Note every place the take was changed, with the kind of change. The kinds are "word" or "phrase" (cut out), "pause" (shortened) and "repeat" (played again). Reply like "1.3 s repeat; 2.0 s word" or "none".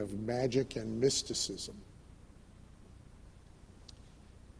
none